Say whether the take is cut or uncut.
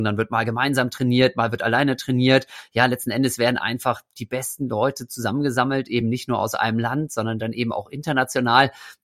uncut